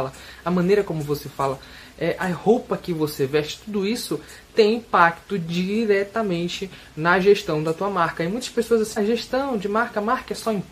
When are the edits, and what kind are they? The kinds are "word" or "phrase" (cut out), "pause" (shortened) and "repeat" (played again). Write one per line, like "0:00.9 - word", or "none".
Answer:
0:09.0 - word